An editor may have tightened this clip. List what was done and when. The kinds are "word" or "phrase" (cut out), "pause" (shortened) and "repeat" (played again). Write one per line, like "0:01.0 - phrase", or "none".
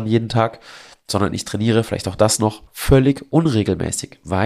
0:02.7 - pause